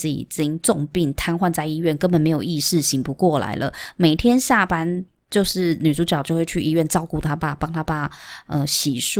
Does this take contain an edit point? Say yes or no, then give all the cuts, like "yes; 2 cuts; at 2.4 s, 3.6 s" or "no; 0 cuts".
no; 0 cuts